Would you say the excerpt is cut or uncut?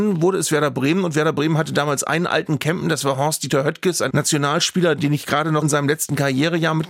cut